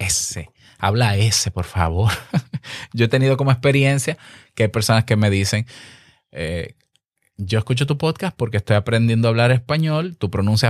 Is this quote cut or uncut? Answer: uncut